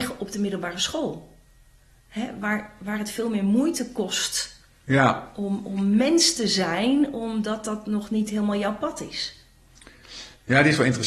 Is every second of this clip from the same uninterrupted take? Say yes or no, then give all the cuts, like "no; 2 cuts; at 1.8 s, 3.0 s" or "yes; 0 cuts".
yes; 0 cuts